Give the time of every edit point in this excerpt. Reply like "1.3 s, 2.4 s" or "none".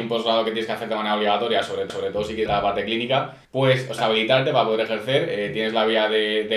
1.9 s, 2.5 s, 3.4 s, 4.0 s